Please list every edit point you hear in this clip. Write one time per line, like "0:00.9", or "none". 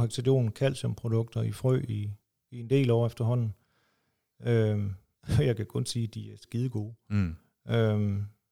none